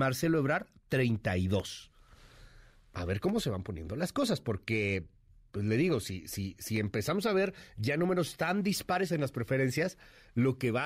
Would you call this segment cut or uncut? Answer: uncut